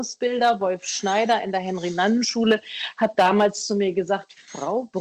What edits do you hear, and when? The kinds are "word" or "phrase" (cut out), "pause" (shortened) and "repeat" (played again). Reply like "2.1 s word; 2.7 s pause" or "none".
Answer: none